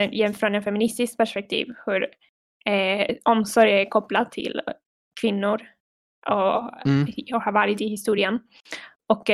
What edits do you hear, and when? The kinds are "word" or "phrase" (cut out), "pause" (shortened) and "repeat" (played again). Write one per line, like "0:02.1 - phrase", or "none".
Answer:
none